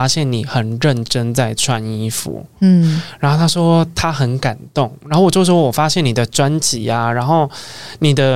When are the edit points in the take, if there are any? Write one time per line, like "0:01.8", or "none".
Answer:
none